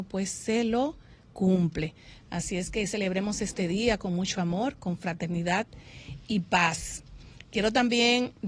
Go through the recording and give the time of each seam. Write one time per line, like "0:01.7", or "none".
none